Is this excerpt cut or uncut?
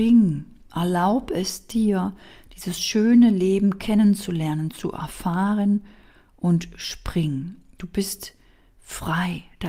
uncut